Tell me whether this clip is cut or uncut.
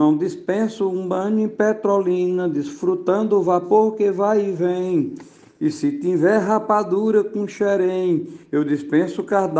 uncut